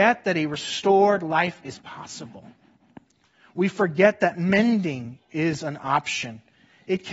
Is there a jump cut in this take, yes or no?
no